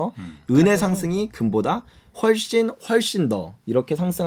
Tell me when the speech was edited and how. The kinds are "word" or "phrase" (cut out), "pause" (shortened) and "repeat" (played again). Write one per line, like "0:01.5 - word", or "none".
none